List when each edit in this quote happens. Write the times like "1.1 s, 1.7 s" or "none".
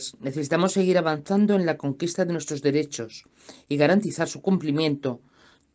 none